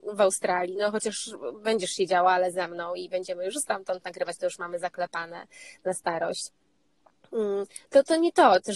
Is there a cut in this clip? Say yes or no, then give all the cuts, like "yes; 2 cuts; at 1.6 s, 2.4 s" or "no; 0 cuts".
no; 0 cuts